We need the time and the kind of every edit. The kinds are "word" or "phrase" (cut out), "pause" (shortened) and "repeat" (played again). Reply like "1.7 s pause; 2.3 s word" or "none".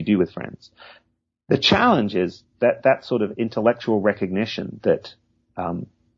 none